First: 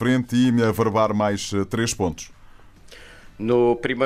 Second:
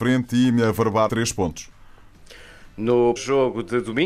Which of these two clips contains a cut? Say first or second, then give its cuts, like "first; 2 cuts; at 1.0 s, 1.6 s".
second; 2 cuts; at 1.1 s, 3.2 s